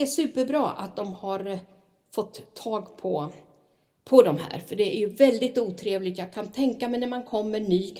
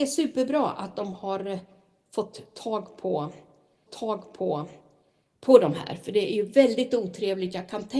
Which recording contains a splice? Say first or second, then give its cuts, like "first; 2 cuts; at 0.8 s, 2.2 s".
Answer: second; 1 cut; at 3.9 s